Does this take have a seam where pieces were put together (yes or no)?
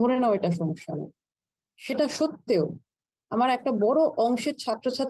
no